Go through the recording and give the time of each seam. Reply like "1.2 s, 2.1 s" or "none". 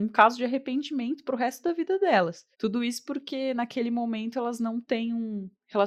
2.5 s